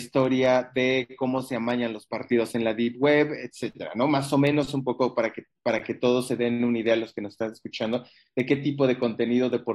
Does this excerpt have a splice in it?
no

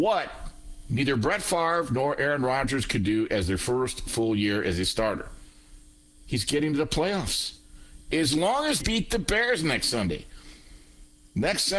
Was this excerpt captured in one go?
no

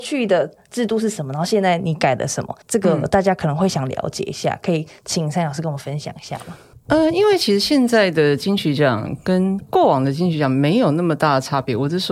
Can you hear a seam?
yes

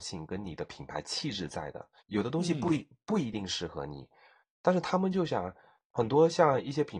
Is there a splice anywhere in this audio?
yes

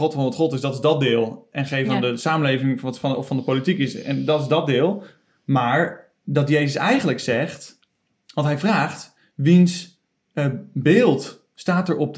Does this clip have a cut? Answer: no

